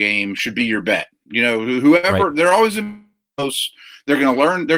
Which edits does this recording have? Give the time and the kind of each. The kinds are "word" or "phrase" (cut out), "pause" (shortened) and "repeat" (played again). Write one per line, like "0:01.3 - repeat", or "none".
none